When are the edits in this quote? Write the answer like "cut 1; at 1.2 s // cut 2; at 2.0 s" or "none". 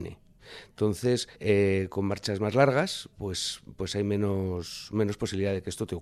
cut 1; at 1.3 s // cut 2; at 3.1 s